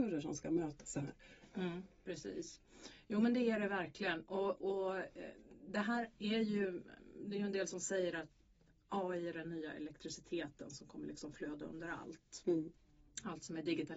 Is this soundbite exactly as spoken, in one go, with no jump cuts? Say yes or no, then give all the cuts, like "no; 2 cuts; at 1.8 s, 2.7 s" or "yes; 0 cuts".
yes; 0 cuts